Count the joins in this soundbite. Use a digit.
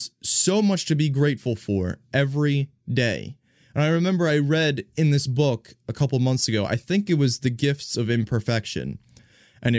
0